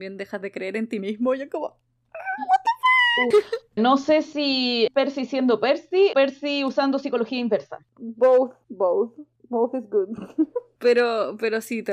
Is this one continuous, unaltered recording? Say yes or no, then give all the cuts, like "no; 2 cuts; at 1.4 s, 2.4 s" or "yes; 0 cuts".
no; 4 cuts; at 3.3 s, 3.8 s, 4.9 s, 6.1 s